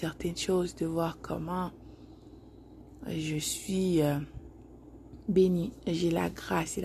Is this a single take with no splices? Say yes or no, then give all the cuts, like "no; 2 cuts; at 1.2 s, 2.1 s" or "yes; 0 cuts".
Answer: yes; 0 cuts